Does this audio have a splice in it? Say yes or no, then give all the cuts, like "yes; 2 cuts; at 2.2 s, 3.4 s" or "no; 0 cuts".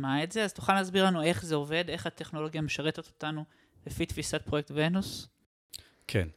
no; 0 cuts